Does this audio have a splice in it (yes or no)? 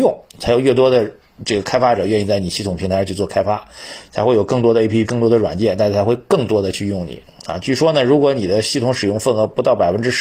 yes